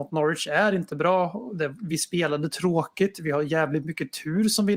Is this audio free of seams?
yes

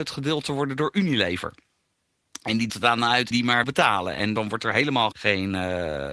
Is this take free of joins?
no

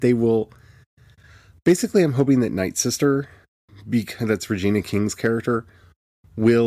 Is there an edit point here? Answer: no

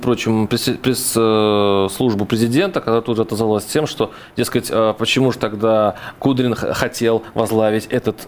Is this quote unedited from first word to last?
yes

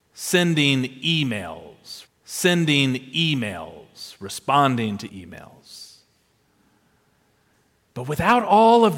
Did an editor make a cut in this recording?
yes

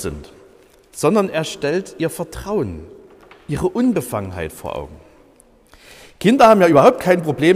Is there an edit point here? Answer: no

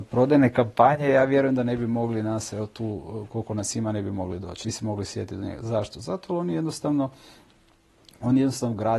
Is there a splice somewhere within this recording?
yes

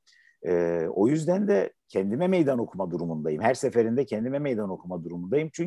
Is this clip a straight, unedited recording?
no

